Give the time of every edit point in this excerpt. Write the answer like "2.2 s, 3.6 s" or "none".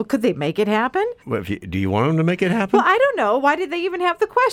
1.2 s